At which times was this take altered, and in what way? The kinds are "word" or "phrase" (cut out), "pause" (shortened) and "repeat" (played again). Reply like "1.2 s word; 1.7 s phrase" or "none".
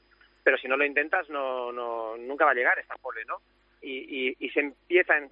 none